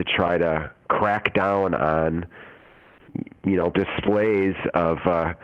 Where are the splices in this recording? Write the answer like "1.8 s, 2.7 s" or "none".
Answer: 3.7 s